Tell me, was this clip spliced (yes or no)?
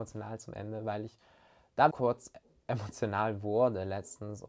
yes